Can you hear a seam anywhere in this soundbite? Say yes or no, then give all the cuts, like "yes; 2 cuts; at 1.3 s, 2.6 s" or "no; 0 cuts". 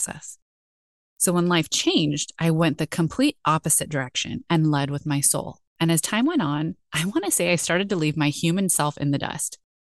yes; 1 cut; at 5.7 s